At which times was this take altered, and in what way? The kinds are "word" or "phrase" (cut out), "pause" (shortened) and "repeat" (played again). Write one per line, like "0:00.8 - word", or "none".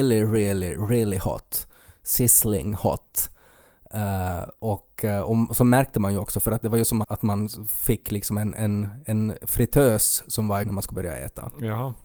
0:07.0 - word
0:10.6 - word